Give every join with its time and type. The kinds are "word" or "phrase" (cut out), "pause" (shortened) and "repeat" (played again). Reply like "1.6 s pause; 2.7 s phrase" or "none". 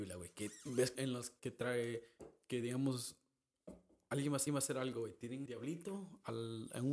0.9 s word; 1.4 s phrase; 4.5 s repeat; 5.5 s word